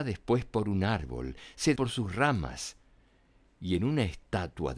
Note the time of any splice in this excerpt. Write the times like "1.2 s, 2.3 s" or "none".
1.8 s